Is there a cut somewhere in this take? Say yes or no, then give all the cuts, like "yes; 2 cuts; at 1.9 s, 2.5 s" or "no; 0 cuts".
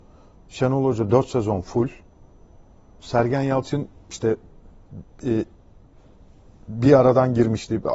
no; 0 cuts